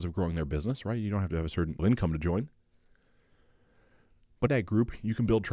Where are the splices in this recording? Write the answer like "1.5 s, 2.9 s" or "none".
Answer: 1.8 s, 4.5 s